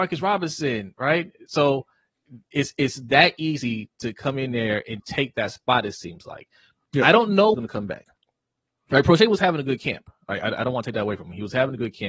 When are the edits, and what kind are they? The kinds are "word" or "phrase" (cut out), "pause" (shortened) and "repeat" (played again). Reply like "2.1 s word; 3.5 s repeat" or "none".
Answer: 5.0 s word; 7.5 s phrase